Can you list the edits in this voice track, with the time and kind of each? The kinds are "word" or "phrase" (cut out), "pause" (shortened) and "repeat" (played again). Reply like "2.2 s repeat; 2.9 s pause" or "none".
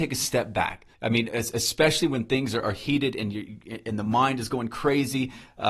0.9 s pause